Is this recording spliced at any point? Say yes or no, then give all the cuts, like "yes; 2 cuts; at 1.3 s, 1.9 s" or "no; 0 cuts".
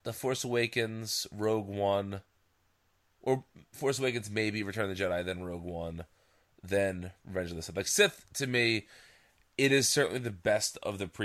no; 0 cuts